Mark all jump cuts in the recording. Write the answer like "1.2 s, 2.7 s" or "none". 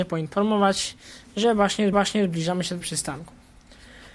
1.9 s, 2.8 s